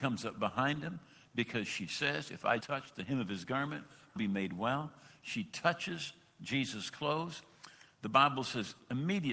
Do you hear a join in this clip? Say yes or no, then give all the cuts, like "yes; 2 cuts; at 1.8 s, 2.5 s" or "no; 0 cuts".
yes; 2 cuts; at 2.6 s, 4.2 s